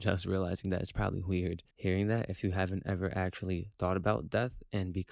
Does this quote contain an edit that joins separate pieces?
yes; 1 cut; at 1.7 s

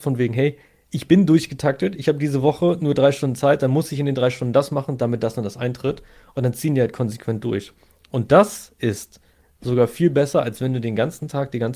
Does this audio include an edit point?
no; 0 cuts

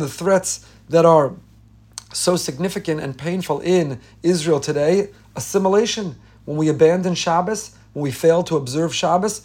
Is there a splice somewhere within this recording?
no; 0 cuts

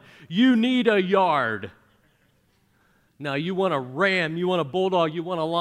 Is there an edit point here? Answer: no; 0 cuts

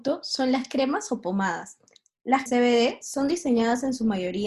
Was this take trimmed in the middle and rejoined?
yes; 1 cut; at 2.5 s

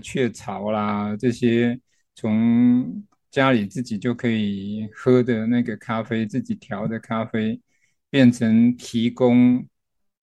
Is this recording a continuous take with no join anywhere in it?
yes; 0 cuts

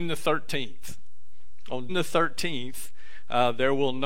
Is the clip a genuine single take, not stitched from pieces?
no; 1 cut; at 1.9 s

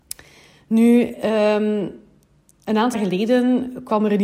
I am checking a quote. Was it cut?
yes; 1 cut; at 2.9 s

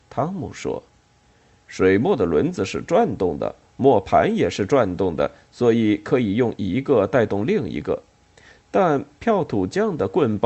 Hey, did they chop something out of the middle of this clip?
no; 0 cuts

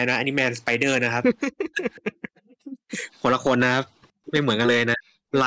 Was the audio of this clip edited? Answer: no; 0 cuts

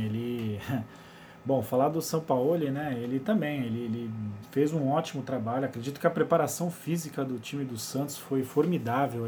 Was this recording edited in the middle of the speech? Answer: no; 0 cuts

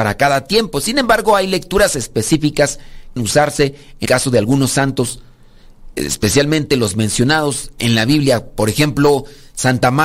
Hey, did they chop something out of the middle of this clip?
yes; 2 cuts; at 3.2 s, 4.1 s

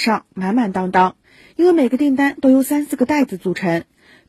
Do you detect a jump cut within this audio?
no; 0 cuts

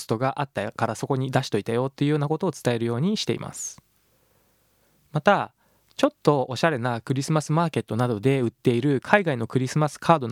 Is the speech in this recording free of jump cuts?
yes; 0 cuts

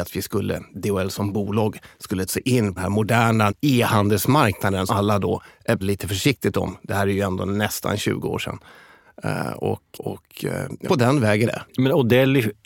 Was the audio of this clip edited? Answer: yes; 8 cuts; at 2.3 s, 2.8 s, 3.5 s, 4.9 s, 5.8 s, 9.9 s, 10.8 s, 11.4 s

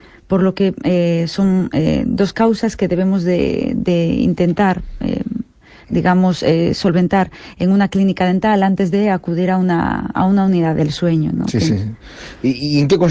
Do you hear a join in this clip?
no; 0 cuts

